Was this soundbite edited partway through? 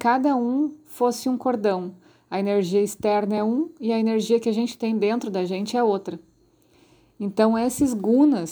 no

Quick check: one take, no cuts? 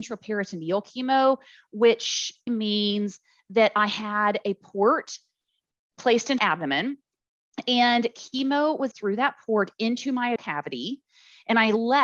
no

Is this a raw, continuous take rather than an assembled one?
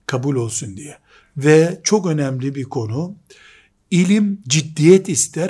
yes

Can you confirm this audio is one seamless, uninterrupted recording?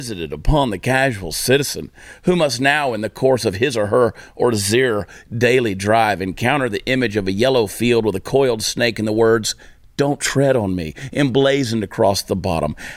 yes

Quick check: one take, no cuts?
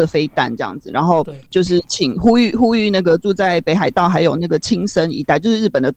no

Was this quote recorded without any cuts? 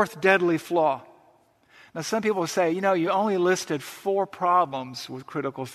yes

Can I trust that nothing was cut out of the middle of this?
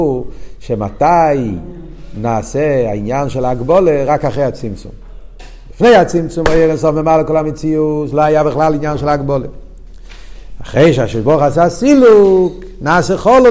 yes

